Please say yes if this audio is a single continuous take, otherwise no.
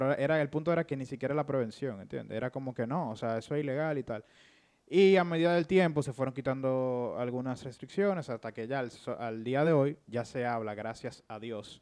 yes